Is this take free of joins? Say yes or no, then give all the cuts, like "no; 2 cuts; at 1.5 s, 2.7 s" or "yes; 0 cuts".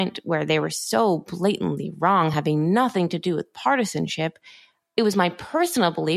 yes; 0 cuts